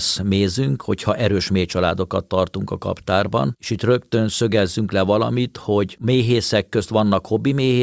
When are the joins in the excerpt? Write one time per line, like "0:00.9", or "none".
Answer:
none